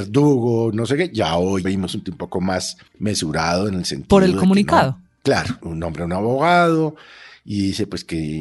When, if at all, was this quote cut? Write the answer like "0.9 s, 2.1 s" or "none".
1.6 s, 2.0 s, 5.6 s